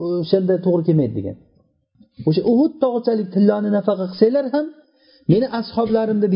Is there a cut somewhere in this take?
no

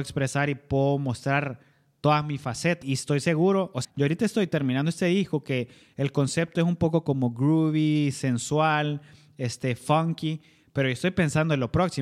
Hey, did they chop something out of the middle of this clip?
yes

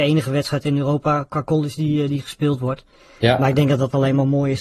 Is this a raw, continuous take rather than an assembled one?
yes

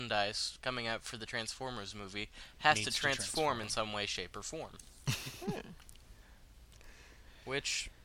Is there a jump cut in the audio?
no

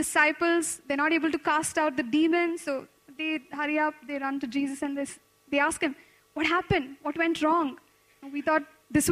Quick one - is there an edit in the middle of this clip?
no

